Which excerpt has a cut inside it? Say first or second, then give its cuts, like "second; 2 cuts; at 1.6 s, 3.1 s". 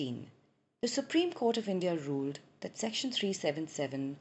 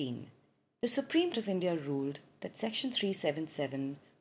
second; 1 cut; at 1.3 s